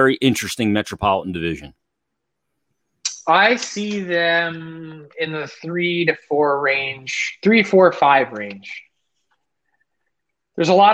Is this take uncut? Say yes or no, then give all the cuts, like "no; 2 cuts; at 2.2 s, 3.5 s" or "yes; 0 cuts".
yes; 0 cuts